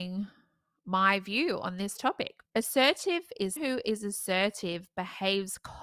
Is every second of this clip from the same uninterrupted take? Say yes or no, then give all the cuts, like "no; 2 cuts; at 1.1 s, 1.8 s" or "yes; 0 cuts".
no; 2 cuts; at 2.5 s, 3.6 s